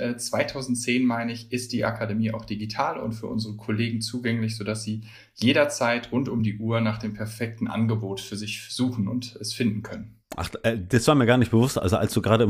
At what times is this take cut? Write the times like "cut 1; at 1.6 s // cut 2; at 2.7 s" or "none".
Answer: none